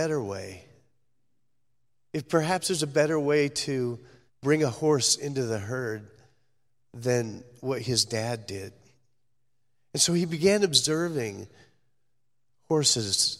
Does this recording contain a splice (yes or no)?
yes